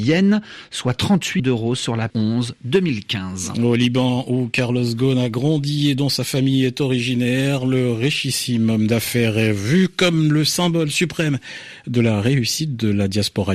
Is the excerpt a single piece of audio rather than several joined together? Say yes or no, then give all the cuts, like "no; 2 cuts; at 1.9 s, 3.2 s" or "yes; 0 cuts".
no; 2 cuts; at 1.4 s, 2.1 s